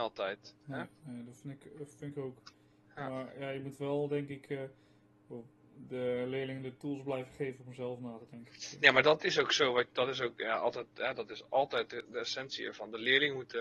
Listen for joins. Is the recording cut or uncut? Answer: uncut